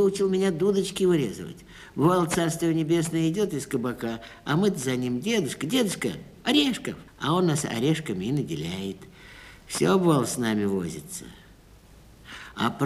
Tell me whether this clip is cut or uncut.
cut